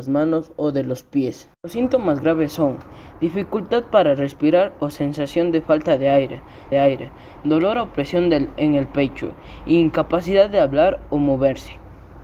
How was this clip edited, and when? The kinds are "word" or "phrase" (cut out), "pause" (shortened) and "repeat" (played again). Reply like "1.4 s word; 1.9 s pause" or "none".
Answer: 1.5 s pause; 6.7 s repeat

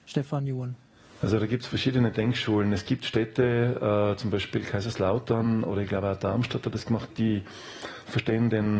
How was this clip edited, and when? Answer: 7.1 s word

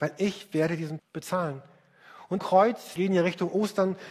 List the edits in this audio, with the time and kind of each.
1.0 s word; 2.4 s word; 3.0 s word

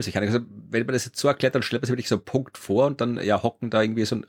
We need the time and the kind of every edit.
none

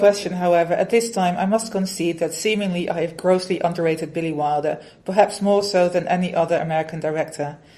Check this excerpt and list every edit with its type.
none

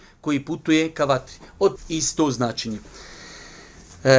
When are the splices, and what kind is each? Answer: 1.8 s word

